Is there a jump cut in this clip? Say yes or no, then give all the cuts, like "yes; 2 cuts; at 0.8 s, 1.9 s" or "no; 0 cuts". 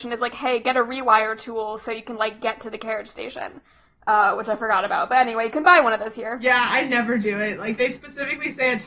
no; 0 cuts